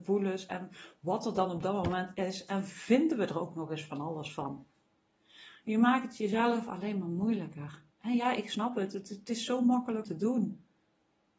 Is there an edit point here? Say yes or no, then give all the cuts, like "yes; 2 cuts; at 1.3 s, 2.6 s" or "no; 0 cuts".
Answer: yes; 2 cuts; at 7.9 s, 10.0 s